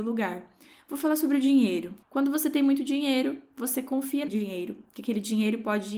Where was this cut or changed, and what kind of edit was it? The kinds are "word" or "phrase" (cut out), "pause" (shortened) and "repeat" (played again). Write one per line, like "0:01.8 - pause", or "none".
0:02.0 - pause
0:04.3 - word

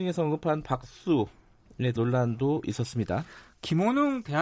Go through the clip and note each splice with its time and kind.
0:02.0 - word

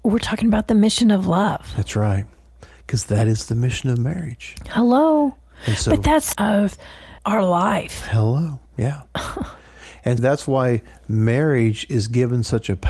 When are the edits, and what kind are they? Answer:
0:06.3 - phrase
0:07.2 - word
0:08.7 - pause
0:10.2 - word

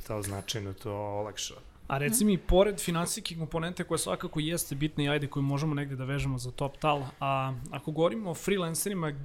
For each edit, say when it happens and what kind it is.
none

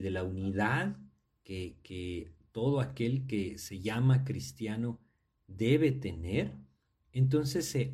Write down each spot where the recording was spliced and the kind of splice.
none

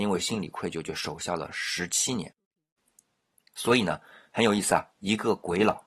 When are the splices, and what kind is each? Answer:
none

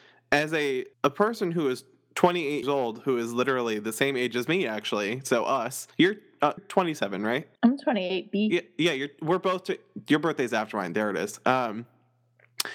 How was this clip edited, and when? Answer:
0:00.9 - pause
0:02.6 - word
0:05.9 - pause
0:06.6 - word
0:07.6 - pause

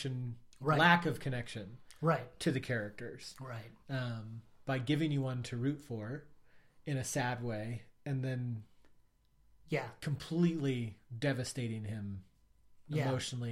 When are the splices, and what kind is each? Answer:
none

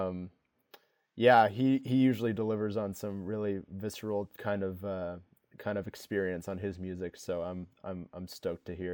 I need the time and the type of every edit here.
none

